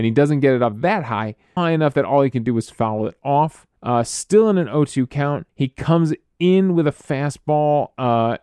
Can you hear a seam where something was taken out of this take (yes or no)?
yes